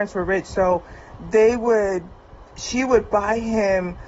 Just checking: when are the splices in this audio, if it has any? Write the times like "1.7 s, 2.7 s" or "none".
none